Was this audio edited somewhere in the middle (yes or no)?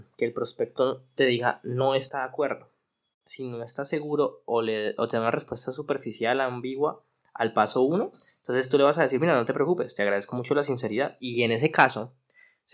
no